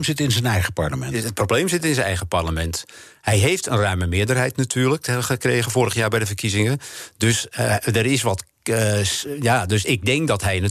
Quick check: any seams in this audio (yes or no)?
no